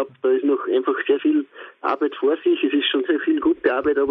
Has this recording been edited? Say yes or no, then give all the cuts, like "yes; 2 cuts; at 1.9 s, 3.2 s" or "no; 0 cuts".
yes; 2 cuts; at 1.2 s, 3.1 s